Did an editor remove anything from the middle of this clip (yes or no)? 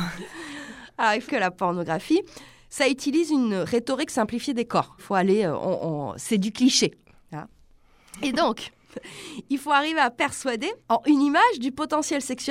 yes